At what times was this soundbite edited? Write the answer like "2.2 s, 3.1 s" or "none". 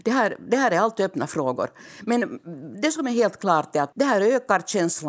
3.9 s